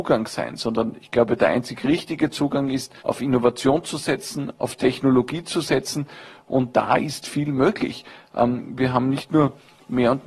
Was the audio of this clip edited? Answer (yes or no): yes